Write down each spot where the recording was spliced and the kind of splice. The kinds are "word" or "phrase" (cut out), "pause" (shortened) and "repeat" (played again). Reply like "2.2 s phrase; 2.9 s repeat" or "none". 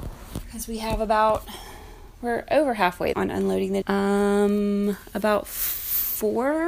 3.1 s word; 3.8 s word